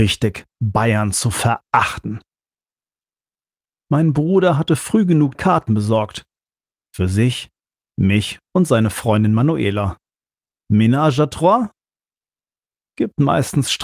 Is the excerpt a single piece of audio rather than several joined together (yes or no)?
no